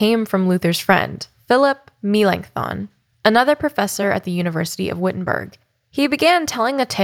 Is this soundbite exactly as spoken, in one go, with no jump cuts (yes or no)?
yes